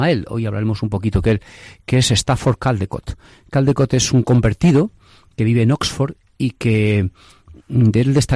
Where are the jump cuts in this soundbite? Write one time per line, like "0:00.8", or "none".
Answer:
none

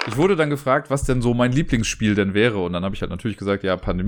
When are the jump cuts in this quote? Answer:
none

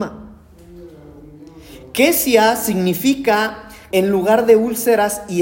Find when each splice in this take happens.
0:03.9

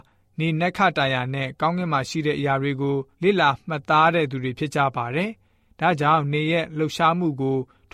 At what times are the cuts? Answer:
0:03.1

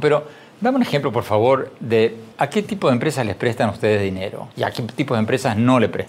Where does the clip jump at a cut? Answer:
0:02.3
0:04.5

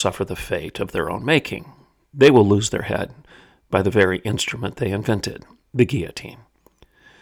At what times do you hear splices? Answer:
none

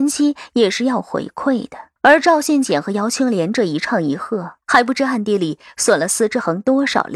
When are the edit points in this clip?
0:02.0
0:04.6

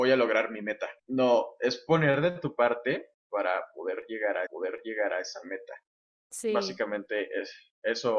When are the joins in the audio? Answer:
0:01.0
0:03.2
0:04.5
0:06.1

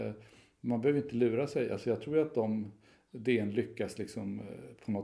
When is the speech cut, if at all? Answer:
none

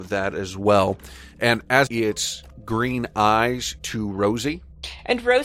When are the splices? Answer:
0:01.9

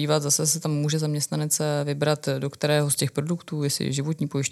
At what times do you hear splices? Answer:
none

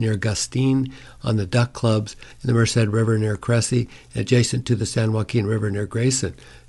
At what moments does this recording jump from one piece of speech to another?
0:02.3

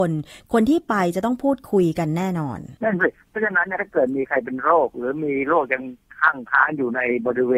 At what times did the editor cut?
0:02.8

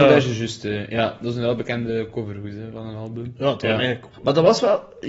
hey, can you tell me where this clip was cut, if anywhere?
0:04.1

